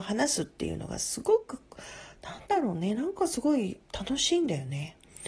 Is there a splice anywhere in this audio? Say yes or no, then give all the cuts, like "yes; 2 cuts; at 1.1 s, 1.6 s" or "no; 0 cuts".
yes; 1 cut; at 3.8 s